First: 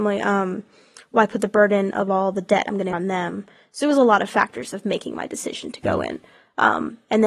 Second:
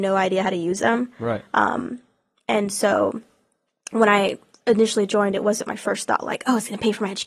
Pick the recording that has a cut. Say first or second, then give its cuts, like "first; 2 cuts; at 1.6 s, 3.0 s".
first; 1 cut; at 2.9 s